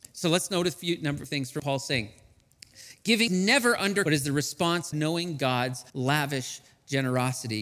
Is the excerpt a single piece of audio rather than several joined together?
no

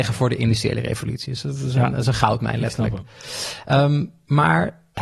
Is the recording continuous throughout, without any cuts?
yes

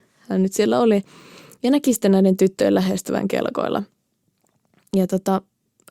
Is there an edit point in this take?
no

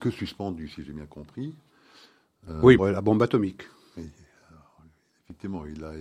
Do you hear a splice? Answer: yes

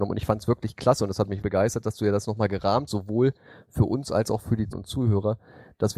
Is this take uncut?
no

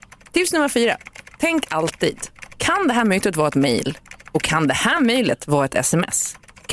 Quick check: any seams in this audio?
no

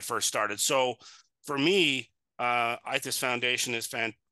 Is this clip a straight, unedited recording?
no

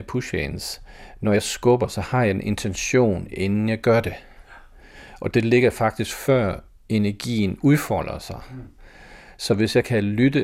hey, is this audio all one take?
yes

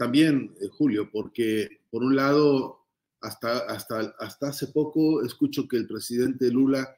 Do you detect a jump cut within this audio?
no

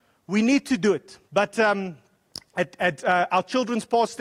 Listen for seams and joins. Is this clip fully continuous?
no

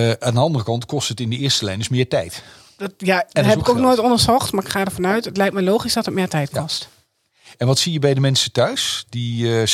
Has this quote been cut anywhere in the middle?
no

